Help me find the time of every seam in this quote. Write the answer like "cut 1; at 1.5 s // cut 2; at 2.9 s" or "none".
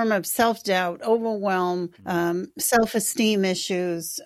cut 1; at 2.0 s